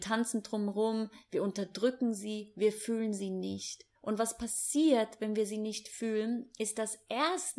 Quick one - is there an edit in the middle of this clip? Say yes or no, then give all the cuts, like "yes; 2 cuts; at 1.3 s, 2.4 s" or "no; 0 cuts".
yes; 1 cut; at 4.0 s